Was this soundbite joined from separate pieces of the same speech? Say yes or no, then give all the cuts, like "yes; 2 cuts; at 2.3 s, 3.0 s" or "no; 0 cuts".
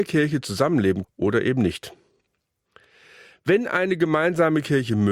yes; 1 cut; at 1.0 s